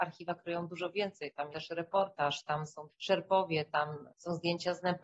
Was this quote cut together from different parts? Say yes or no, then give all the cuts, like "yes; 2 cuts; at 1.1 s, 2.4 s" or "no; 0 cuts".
yes; 2 cuts; at 1.5 s, 2.9 s